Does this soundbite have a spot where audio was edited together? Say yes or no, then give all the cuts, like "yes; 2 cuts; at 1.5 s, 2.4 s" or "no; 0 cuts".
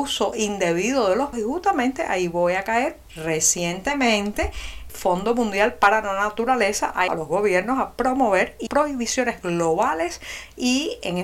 yes; 5 cuts; at 1.3 s, 3.1 s, 4.9 s, 7.1 s, 8.7 s